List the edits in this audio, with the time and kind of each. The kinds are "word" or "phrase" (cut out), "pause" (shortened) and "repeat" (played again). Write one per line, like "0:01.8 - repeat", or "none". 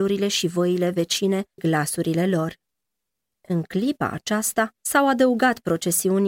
0:01.6 - word